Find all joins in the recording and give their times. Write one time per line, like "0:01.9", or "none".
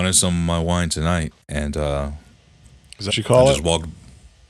0:01.4
0:03.1